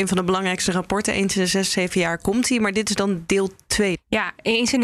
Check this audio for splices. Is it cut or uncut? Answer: uncut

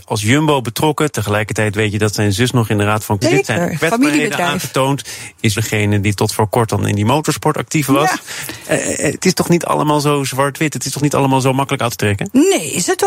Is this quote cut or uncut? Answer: cut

